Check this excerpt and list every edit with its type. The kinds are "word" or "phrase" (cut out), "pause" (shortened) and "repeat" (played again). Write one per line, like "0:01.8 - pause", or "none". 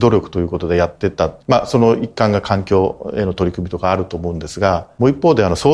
0:01.4 - pause